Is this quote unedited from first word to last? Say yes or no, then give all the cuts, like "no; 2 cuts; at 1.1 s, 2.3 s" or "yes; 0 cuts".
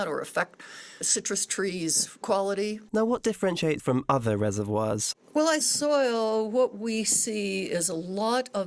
no; 6 cuts; at 1.0 s, 2.2 s, 2.9 s, 3.8 s, 5.2 s, 5.6 s